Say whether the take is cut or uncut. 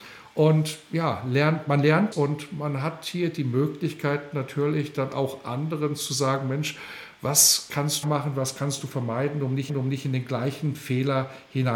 cut